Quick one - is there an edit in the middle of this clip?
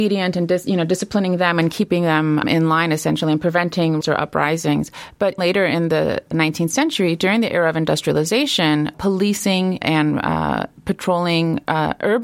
yes; 6 cuts; at 2.4 s, 4.0 s, 5.4 s, 6.3 s, 8.9 s, 9.8 s

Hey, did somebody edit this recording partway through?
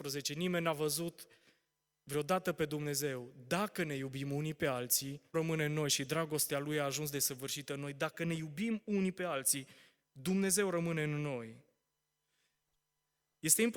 yes; 1 cut; at 5.3 s

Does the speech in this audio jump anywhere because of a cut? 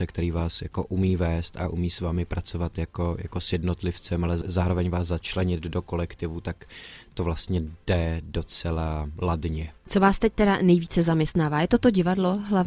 no; 0 cuts

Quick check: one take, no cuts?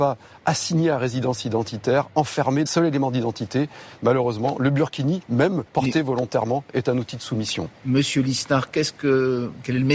no; 2 cuts; at 2.7 s, 5.7 s

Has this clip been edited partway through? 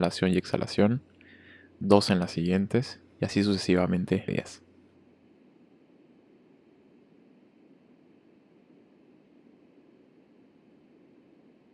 yes; 1 cut; at 4.3 s

